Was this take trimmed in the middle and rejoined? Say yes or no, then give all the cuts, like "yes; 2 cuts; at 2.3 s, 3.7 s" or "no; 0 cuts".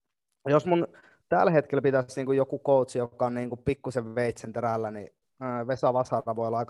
no; 0 cuts